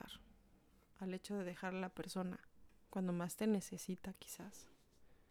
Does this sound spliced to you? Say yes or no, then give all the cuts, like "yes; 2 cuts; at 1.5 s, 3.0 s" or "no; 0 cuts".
no; 0 cuts